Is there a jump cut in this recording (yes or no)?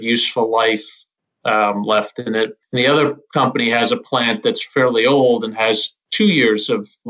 no